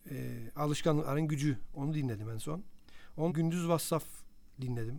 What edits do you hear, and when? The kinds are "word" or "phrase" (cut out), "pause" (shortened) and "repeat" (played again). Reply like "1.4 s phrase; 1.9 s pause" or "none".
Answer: 3.3 s word